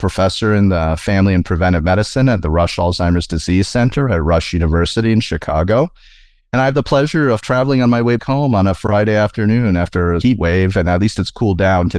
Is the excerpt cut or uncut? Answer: cut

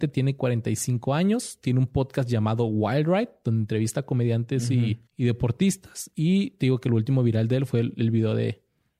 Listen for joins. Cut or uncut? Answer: cut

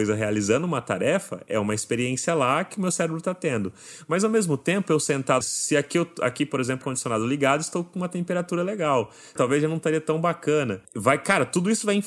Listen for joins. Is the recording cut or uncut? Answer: cut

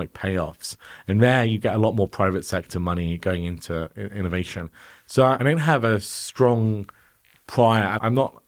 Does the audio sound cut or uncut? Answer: uncut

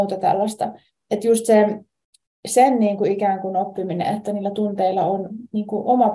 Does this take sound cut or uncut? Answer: uncut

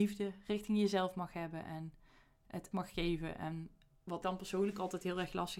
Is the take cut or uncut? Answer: cut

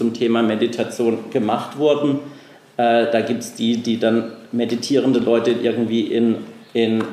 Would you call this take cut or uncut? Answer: uncut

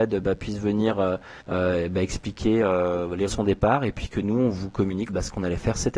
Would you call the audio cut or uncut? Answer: cut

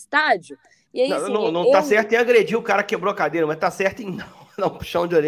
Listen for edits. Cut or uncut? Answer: uncut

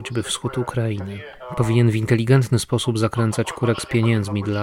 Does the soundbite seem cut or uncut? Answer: uncut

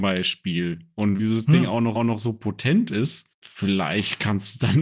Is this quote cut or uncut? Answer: cut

